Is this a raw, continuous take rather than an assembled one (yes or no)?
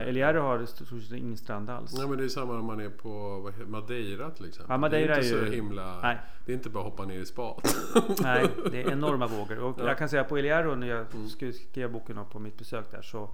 yes